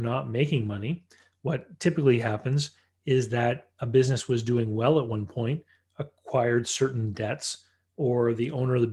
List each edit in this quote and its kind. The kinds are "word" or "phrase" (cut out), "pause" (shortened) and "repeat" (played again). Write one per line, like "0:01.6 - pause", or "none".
none